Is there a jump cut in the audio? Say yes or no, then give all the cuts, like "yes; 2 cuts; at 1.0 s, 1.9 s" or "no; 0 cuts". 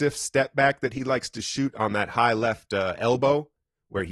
no; 0 cuts